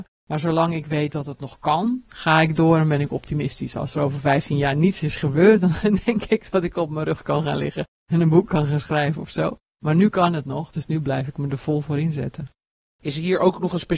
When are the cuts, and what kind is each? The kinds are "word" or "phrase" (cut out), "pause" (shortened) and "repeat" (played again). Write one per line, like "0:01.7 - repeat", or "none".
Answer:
none